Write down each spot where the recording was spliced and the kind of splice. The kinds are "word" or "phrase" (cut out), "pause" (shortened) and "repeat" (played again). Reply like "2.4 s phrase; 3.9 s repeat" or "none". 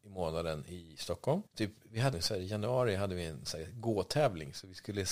1.5 s pause; 2.1 s phrase